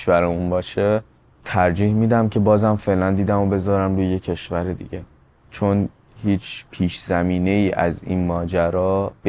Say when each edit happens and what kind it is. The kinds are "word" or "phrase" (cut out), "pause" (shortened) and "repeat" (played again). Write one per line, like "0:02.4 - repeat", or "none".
none